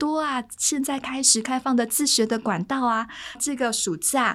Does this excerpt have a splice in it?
yes; 1 cut; at 3.4 s

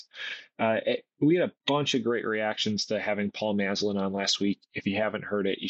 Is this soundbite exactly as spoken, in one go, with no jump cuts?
no; 1 cut; at 1.6 s

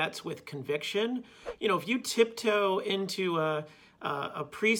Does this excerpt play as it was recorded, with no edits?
yes; 0 cuts

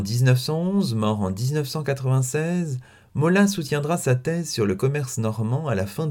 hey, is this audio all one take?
yes; 0 cuts

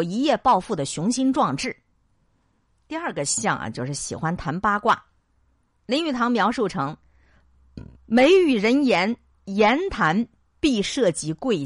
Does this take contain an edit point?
no; 0 cuts

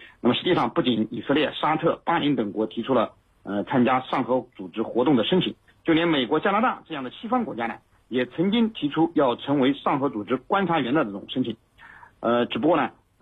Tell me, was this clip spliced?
no; 0 cuts

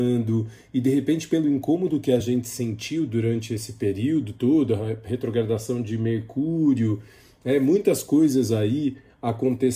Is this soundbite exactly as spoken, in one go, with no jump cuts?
yes; 0 cuts

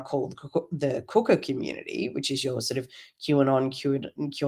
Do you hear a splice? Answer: no; 0 cuts

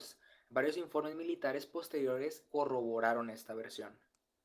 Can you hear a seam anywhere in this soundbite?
no; 0 cuts

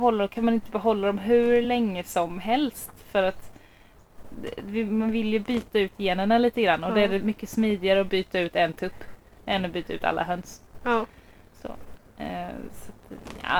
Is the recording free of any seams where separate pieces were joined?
yes; 0 cuts

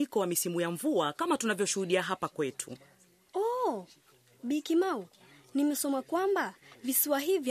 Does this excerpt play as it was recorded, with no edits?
yes; 0 cuts

